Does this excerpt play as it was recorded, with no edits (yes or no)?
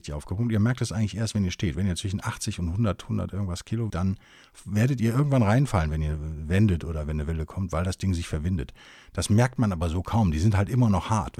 no